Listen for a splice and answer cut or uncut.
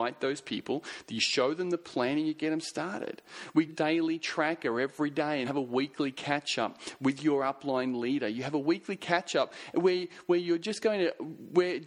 cut